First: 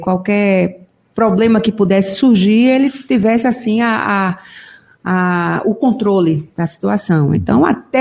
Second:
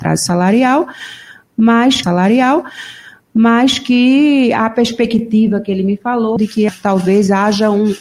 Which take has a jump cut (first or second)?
second